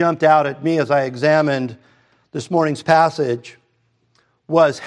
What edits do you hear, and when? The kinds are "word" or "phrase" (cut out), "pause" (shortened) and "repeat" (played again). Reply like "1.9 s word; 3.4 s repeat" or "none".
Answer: none